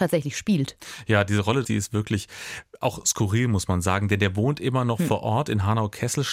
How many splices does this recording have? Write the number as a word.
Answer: one